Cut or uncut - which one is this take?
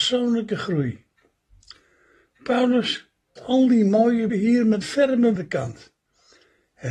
cut